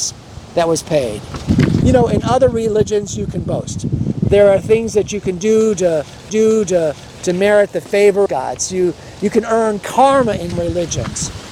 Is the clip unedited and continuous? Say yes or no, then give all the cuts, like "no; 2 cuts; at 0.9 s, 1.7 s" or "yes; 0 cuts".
no; 3 cuts; at 6.3 s, 8.3 s, 10.5 s